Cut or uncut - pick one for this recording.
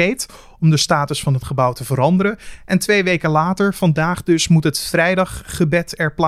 uncut